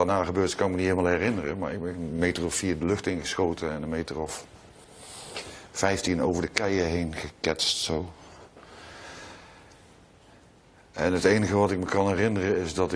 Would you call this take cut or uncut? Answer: uncut